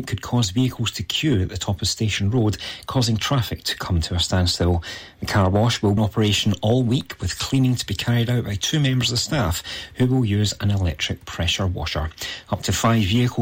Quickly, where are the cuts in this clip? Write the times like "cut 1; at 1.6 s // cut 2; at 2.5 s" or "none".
cut 1; at 6.0 s